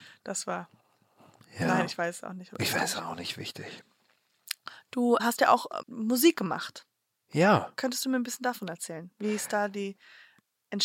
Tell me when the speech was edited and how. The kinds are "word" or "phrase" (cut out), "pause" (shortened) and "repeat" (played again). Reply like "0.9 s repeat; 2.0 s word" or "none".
5.2 s word; 5.8 s word